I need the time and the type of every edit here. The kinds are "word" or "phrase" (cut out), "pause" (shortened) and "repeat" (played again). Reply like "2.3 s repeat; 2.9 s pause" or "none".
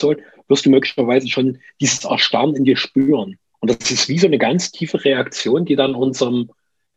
3.5 s pause